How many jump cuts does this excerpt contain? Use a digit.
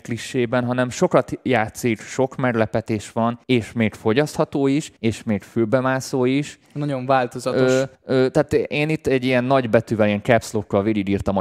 4